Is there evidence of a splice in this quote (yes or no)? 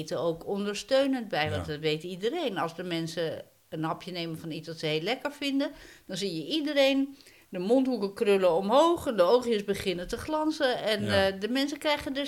no